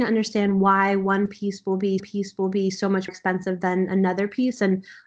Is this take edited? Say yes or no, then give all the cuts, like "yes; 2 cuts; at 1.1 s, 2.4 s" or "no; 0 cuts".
yes; 2 cuts; at 2.0 s, 3.1 s